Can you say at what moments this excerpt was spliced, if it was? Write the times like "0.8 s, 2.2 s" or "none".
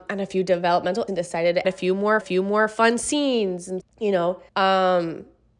1.1 s, 1.6 s, 2.2 s, 3.8 s, 4.5 s